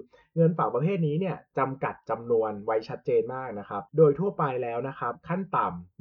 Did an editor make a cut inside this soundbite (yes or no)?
yes